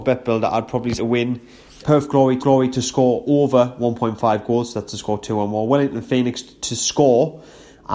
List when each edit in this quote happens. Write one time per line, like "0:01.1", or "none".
0:01.0
0:01.8
0:02.4